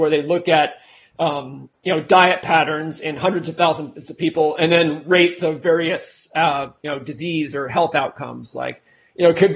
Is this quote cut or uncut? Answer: uncut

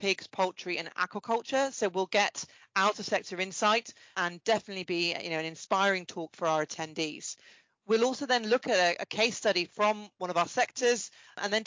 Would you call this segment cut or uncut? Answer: uncut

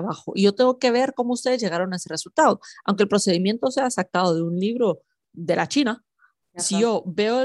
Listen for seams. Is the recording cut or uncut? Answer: uncut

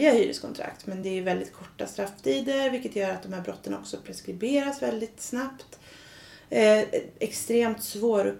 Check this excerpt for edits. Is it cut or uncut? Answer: uncut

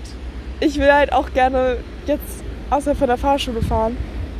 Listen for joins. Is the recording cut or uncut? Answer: uncut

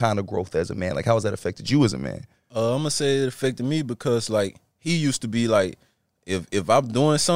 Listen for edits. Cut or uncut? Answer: uncut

